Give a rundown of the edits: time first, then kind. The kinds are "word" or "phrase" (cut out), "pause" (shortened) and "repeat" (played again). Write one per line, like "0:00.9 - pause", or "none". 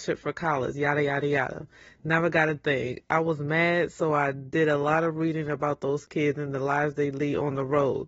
none